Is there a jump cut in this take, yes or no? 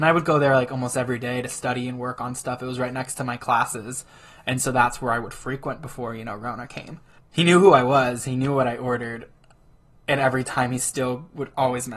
no